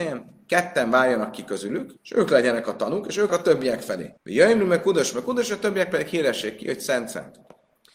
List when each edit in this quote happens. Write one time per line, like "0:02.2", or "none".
0:02.0
0:03.3
0:04.2